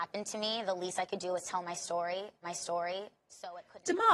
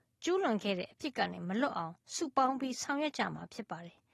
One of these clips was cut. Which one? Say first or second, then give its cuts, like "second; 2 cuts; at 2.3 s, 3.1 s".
first; 1 cut; at 2.4 s